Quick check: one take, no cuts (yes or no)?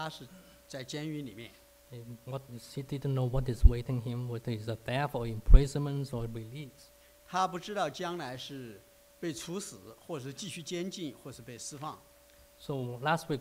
yes